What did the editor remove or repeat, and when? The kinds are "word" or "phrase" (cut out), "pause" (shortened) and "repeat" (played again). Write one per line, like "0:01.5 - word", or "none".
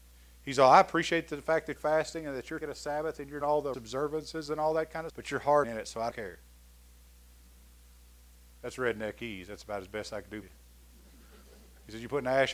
0:01.8 - word
0:02.6 - word
0:03.4 - word
0:03.7 - word
0:05.1 - word
0:05.6 - word
0:06.1 - word
0:10.4 - word